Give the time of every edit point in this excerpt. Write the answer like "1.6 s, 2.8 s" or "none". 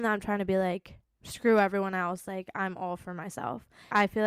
none